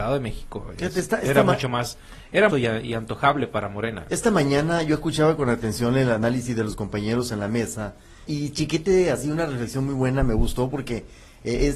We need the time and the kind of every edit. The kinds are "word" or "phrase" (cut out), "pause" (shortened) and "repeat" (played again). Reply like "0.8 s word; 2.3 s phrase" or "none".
2.5 s phrase; 8.3 s word

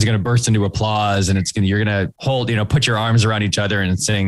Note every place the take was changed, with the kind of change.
2.1 s pause

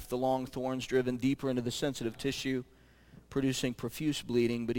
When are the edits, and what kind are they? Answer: 2.1 s word

